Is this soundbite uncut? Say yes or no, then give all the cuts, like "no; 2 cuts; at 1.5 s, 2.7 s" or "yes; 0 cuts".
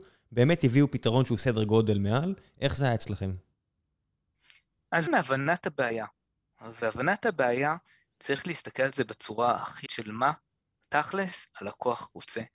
no; 2 cuts; at 5.1 s, 9.9 s